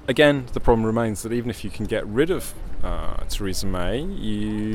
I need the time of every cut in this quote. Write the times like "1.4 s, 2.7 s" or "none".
none

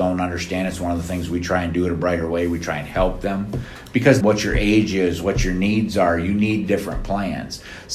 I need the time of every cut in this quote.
4.2 s

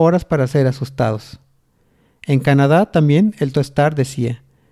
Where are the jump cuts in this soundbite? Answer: 3.5 s

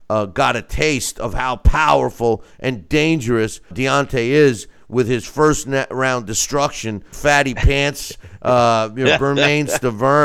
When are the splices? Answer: 3.7 s, 7.1 s

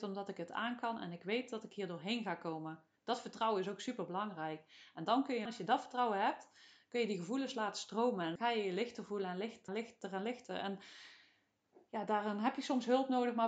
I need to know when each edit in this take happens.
5.5 s, 8.4 s, 9.7 s

